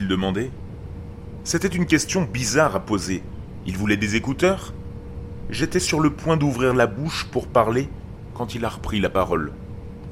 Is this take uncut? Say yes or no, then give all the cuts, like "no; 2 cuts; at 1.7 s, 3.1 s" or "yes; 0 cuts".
yes; 0 cuts